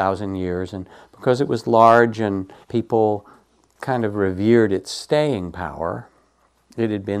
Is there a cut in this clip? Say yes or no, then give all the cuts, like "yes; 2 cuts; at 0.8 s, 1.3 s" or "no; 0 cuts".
yes; 1 cut; at 2.6 s